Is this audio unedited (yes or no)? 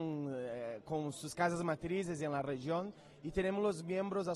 yes